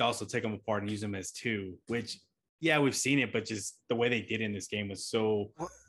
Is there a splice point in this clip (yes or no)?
yes